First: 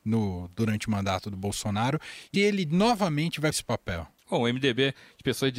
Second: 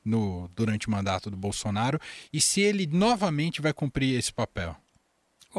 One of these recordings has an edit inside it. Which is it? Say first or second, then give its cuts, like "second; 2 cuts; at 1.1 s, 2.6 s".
first; 3 cuts; at 2.3 s, 3.5 s, 4.2 s